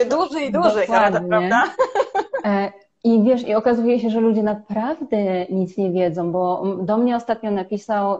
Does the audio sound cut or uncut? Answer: uncut